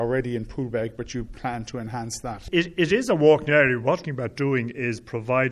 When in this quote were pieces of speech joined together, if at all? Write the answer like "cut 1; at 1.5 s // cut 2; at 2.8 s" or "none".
cut 1; at 4.0 s